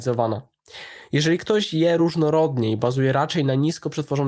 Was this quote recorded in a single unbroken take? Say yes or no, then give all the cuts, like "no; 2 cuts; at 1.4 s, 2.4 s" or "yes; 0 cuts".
yes; 0 cuts